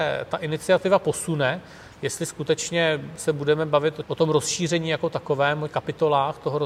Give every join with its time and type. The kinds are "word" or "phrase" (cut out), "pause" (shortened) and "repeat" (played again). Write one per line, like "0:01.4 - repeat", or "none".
0:04.0 - word
0:05.7 - word